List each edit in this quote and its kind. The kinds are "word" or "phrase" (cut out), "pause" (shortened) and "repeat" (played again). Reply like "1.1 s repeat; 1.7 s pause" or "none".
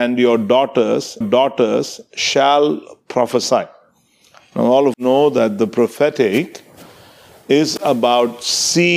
1.2 s repeat; 4.9 s word